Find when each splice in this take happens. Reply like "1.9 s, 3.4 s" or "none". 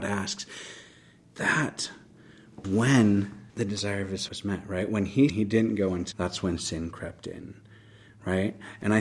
2.6 s, 3.5 s, 4.3 s, 5.3 s, 6.1 s